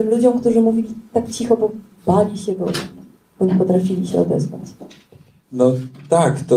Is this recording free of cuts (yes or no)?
yes